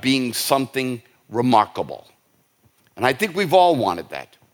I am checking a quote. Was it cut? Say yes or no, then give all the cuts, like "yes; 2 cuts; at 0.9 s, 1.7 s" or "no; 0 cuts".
no; 0 cuts